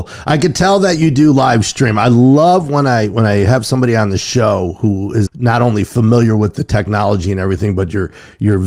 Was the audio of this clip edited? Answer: yes; 1 cut; at 5.3 s

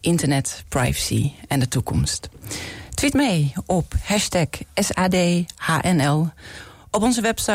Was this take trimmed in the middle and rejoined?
yes; 1 cut; at 3.1 s

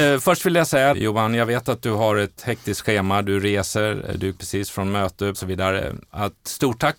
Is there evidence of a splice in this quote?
yes; 3 cuts; at 0.9 s, 4.3 s, 5.3 s

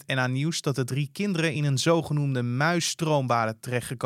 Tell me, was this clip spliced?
no; 0 cuts

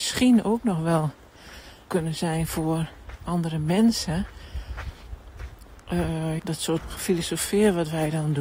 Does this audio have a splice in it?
yes; 3 cuts; at 1.9 s, 6.4 s, 6.8 s

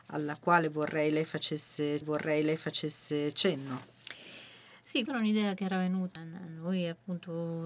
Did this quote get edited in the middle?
yes; 3 cuts; at 2.0 s, 5.1 s, 6.2 s

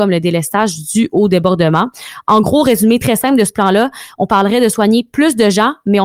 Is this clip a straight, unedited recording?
yes; 0 cuts

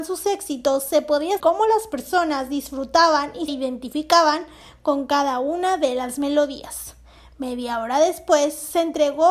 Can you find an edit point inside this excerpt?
yes; 2 cuts; at 1.4 s, 3.5 s

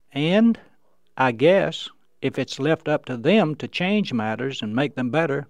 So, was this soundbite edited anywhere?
no; 0 cuts

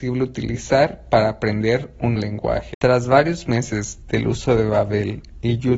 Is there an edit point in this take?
yes; 1 cut; at 2.2 s

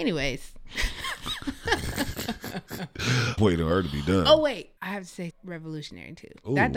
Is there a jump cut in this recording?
yes; 3 cuts; at 3.4 s, 4.8 s, 5.3 s

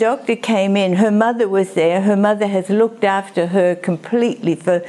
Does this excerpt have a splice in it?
no; 0 cuts

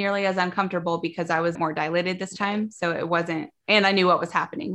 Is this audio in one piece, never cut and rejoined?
no; 2 cuts; at 1.5 s, 3.6 s

